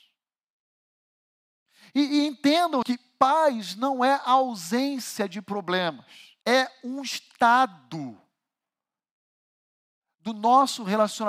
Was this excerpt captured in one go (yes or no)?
no